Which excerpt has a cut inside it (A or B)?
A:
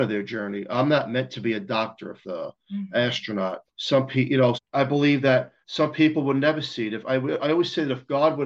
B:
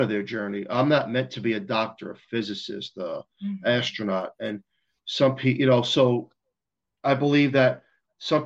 A